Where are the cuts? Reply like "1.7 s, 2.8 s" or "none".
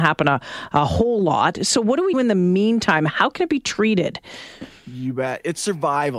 2.1 s